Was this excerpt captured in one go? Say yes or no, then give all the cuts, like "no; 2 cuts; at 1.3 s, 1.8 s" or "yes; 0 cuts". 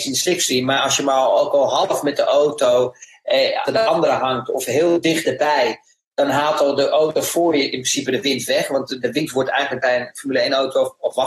no; 1 cut; at 3.7 s